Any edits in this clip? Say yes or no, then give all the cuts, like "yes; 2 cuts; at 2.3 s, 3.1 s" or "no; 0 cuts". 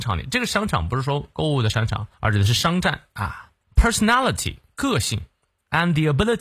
yes; 2 cuts; at 2.1 s, 3.6 s